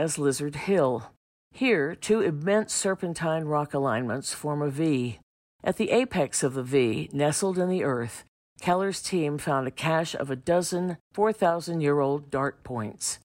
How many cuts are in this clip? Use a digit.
0